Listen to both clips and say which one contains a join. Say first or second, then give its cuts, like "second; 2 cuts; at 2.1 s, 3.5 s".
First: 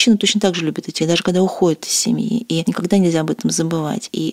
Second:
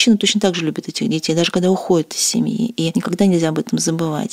first; 1 cut; at 1.0 s